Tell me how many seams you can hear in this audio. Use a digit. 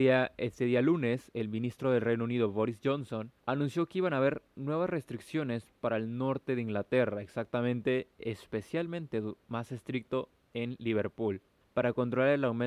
2